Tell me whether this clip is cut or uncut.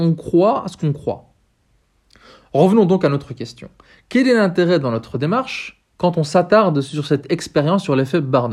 uncut